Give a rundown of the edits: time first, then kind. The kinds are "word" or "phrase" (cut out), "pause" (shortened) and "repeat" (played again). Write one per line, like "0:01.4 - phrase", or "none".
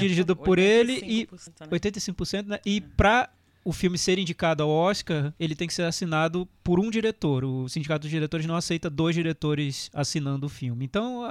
none